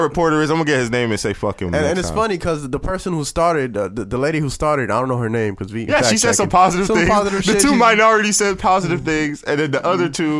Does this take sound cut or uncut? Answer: cut